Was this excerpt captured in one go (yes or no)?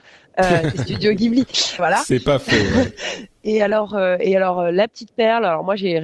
no